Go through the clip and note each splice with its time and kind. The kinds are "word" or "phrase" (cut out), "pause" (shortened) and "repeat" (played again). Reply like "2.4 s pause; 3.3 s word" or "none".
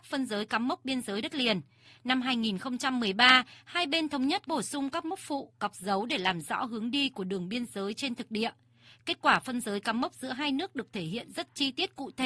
4.5 s word

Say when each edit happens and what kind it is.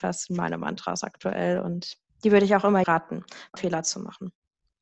2.1 s pause; 2.8 s word; 3.6 s phrase

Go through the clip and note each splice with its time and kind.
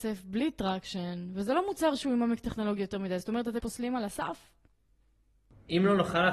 3.6 s word

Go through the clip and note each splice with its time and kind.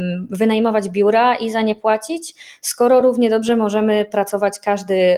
none

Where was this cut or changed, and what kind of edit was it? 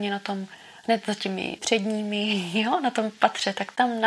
1.6 s word

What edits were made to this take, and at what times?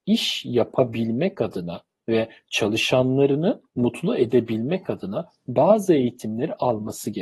3.7 s pause

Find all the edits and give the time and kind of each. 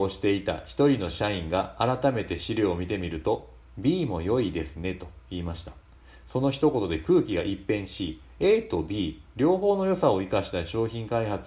none

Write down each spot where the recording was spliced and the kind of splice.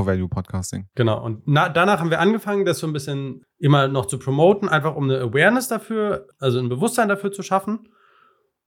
none

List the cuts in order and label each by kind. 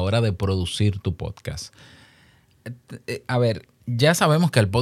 none

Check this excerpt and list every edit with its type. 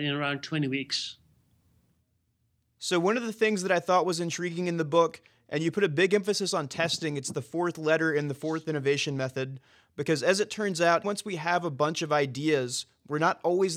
11.0 s word

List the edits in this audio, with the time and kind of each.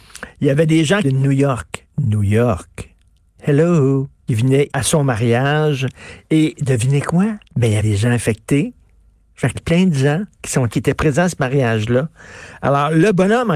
1.0 s phrase; 1.9 s pause; 4.3 s phrase; 4.7 s word; 7.4 s pause; 7.8 s word; 9.5 s phrase; 10.3 s pause; 10.7 s word

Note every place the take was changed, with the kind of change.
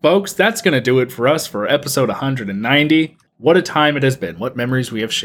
3.3 s pause

